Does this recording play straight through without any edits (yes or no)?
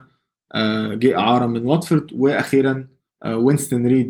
yes